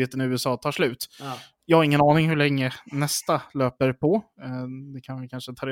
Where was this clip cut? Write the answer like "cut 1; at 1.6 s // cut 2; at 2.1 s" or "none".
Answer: none